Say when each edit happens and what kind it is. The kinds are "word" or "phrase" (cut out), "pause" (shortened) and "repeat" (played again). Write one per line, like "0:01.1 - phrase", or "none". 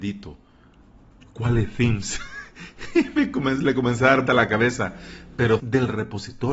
0:04.3 - word
0:05.6 - word